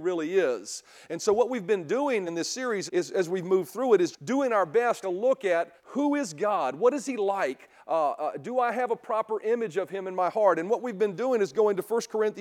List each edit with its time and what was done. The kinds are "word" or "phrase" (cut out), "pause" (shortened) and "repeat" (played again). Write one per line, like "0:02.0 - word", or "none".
0:02.3 - word
0:02.9 - word
0:04.1 - word
0:05.0 - phrase
0:05.8 - pause